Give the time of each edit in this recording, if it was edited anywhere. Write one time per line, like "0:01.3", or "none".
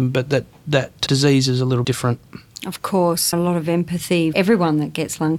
0:01.1
0:01.8
0:03.3
0:04.3